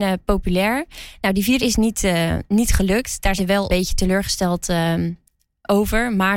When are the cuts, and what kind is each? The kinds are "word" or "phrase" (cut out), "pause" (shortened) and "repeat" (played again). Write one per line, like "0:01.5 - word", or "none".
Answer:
0:01.6 - word
0:03.4 - word
0:03.7 - word